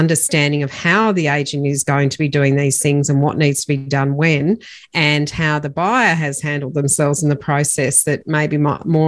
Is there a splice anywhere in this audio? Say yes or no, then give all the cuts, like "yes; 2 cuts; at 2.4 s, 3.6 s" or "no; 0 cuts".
no; 0 cuts